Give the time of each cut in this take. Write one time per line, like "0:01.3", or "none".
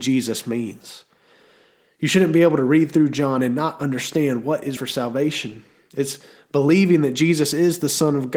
0:04.8